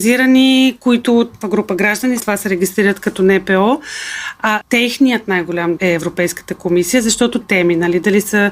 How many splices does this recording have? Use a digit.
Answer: 5